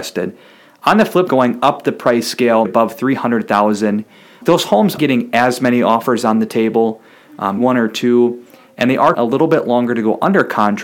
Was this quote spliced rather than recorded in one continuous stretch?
yes; 6 cuts; at 1.3 s, 2.6 s, 4.4 s, 5.0 s, 7.6 s, 9.1 s

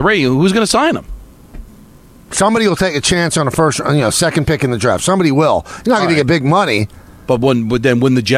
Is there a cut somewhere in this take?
no; 0 cuts

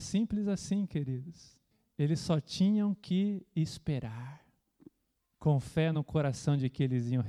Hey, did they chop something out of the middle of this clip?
no; 0 cuts

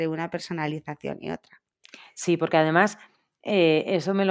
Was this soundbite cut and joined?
no; 0 cuts

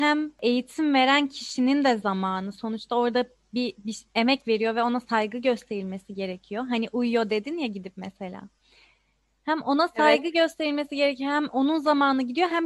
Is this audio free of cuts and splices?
yes; 0 cuts

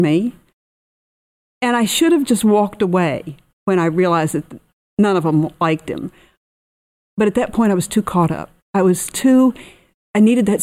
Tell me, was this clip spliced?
yes; 1 cut; at 4.8 s

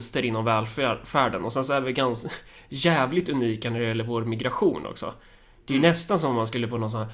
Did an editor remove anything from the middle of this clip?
no; 0 cuts

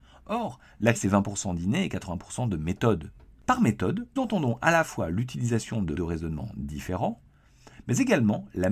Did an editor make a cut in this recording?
yes; 3 cuts; at 0.9 s, 4.2 s, 6.0 s

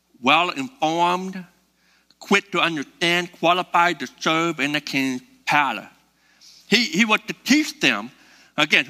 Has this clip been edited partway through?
no; 0 cuts

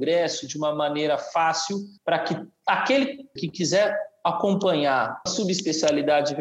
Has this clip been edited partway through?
yes; 3 cuts; at 2.0 s, 3.4 s, 5.3 s

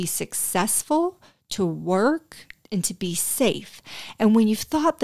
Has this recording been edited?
no; 0 cuts

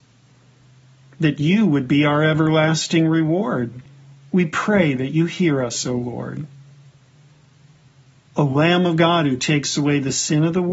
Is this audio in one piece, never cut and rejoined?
yes; 0 cuts

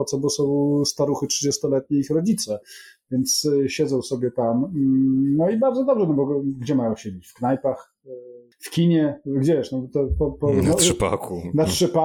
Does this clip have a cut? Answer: no; 0 cuts

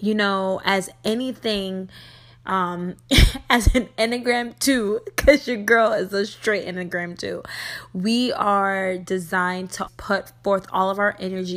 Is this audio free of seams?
no; 1 cut; at 9.9 s

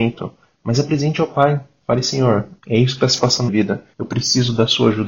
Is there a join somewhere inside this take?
yes; 2 cuts; at 3.5 s, 3.9 s

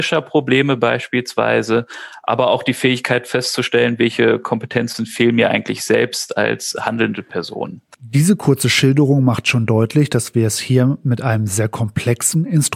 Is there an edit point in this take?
no; 0 cuts

